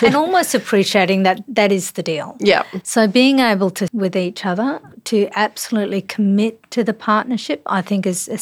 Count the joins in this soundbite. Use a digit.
1